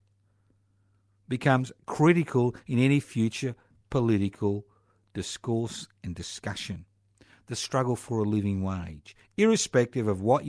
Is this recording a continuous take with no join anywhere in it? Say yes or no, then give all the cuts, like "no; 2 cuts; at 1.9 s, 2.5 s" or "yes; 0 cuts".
yes; 0 cuts